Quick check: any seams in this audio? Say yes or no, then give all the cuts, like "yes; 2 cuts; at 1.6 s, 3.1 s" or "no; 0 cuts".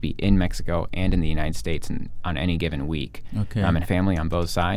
yes; 1 cut; at 3.8 s